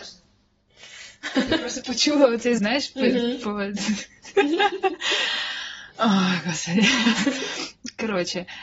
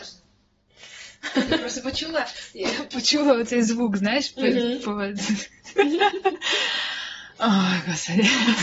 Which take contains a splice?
first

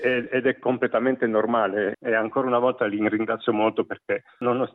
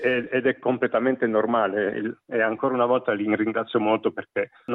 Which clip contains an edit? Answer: first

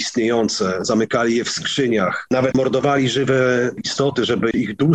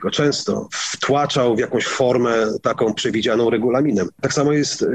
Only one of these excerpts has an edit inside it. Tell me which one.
first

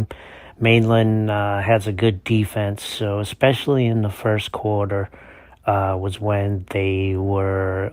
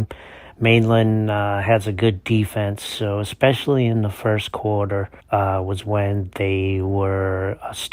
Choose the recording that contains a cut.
second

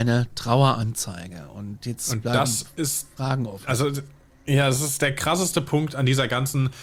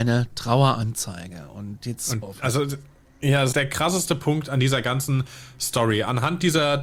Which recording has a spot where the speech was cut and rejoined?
second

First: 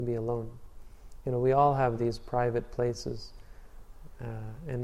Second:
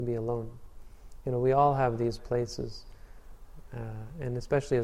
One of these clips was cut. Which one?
second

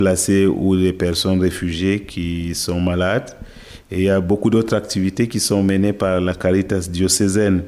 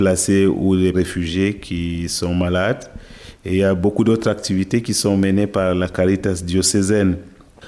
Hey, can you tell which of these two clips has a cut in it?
second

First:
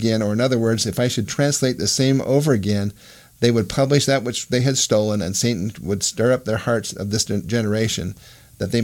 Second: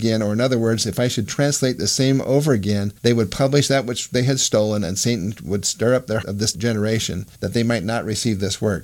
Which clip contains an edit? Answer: second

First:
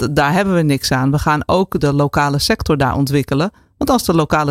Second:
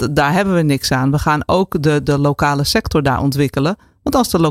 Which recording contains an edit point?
first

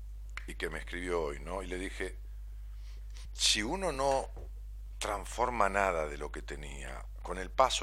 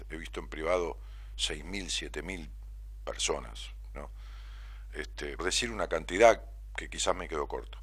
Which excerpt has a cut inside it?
second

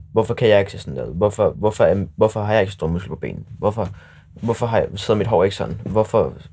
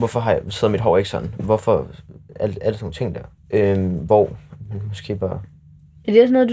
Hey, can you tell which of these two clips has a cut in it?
second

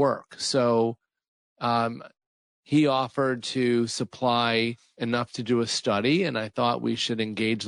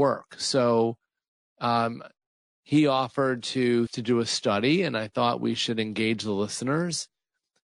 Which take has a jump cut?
second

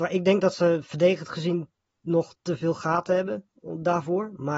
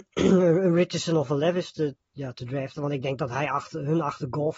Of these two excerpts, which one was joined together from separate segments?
second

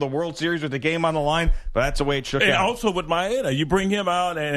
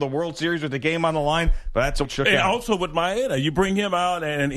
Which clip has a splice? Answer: second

